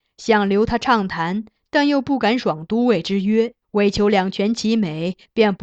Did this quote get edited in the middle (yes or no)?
yes